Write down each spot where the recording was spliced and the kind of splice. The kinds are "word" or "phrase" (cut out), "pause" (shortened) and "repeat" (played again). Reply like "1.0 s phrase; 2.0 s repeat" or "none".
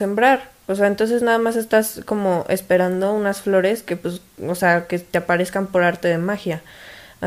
none